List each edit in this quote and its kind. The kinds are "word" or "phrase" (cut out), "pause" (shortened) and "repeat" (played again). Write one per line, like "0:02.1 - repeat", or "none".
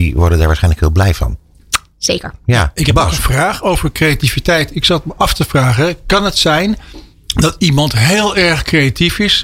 0:07.1 - pause